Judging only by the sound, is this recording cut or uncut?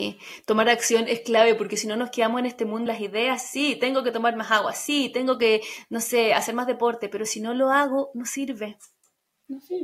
cut